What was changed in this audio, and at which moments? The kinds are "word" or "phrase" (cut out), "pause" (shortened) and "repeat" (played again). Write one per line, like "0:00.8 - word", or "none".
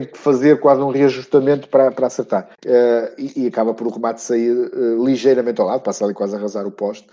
0:02.5 - pause

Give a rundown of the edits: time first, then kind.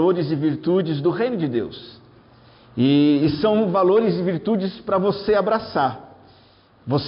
none

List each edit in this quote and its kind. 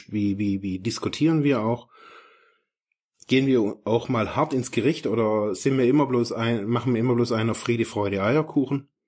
none

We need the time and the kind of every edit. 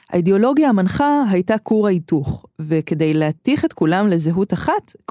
none

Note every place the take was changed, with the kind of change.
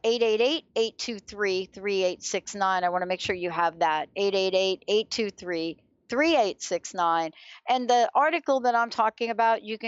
none

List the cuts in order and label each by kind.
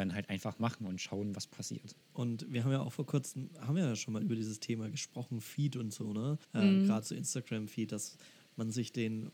0:02.0 - pause
0:06.4 - pause

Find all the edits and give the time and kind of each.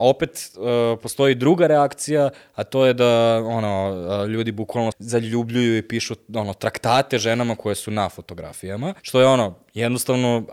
0:04.9 - word
0:09.0 - pause

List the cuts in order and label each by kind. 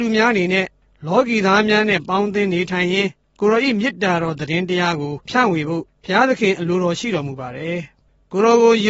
0:05.2 - pause

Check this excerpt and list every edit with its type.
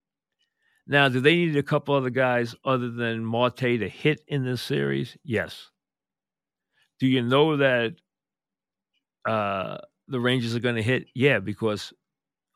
none

